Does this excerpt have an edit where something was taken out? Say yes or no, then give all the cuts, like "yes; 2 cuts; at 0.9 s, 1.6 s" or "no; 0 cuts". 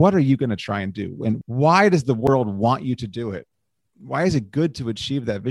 no; 0 cuts